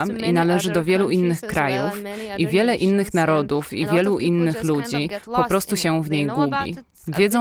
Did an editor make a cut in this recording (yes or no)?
no